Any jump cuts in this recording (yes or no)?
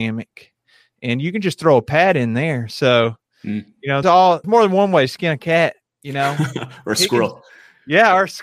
yes